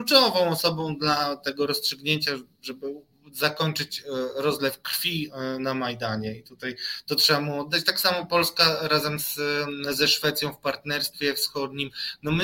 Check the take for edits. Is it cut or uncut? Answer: uncut